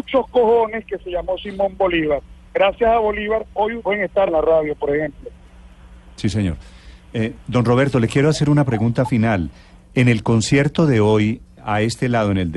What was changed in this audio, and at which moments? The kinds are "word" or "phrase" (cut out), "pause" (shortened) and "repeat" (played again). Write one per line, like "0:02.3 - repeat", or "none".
0:03.8 - word
0:04.3 - phrase